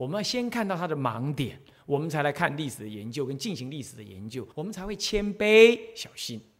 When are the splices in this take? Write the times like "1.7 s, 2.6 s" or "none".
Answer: 4.5 s